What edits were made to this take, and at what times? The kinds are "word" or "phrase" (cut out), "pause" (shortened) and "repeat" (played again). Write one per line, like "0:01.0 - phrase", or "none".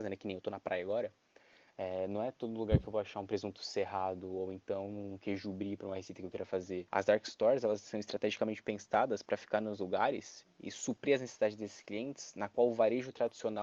0:06.9 - pause